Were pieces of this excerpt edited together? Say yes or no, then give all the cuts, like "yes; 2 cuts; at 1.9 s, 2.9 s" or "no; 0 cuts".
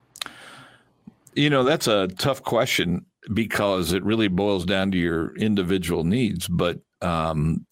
no; 0 cuts